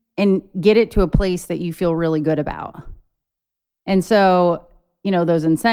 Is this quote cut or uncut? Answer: uncut